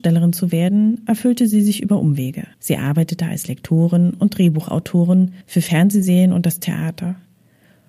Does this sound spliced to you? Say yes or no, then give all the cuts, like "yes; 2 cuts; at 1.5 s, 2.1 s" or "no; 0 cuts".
yes; 2 cuts; at 2.5 s, 5.4 s